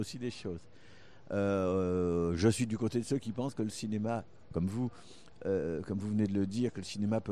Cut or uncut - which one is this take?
uncut